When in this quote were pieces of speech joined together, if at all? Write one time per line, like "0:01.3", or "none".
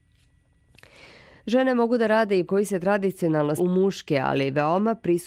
0:02.5
0:03.6